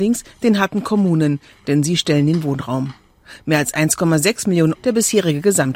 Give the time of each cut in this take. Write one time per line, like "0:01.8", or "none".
0:04.7